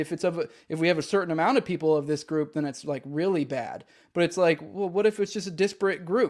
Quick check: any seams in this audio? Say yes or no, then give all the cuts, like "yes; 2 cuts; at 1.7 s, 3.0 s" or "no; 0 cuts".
no; 0 cuts